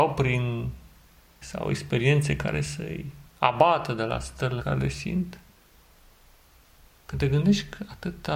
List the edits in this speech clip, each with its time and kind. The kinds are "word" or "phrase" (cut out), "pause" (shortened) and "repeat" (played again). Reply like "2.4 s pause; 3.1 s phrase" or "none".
1.4 s word; 3.3 s pause; 4.6 s word